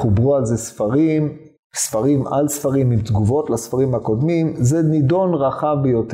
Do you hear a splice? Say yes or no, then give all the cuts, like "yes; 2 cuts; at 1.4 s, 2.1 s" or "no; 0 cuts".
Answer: yes; 1 cut; at 1.6 s